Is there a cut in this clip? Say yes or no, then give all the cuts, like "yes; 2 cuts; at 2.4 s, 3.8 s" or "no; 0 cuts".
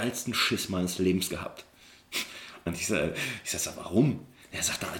no; 0 cuts